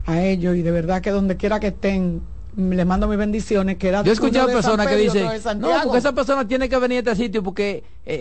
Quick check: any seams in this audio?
no; 0 cuts

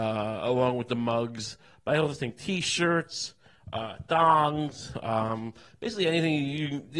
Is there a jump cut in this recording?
no; 0 cuts

